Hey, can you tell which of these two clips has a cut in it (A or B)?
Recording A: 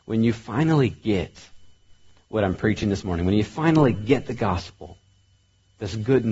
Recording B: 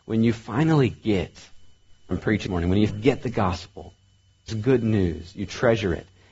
B